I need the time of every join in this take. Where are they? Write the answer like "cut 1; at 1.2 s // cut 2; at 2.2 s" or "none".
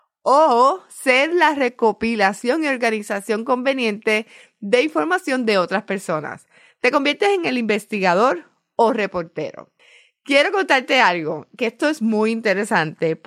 none